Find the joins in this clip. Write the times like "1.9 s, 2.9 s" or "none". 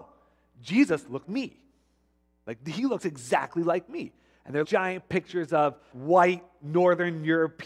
1.2 s, 4.6 s, 5.9 s